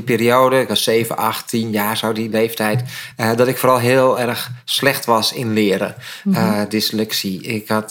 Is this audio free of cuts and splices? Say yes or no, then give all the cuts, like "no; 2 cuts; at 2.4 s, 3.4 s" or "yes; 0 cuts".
yes; 0 cuts